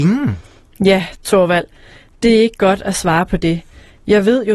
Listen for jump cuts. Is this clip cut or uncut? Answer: uncut